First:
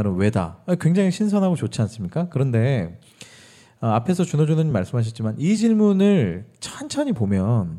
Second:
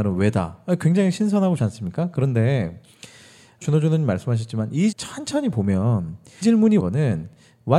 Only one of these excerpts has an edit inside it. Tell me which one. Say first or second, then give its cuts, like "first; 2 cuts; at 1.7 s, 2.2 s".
second; 5 cuts; at 1.6 s, 3.6 s, 4.9 s, 6.4 s, 6.8 s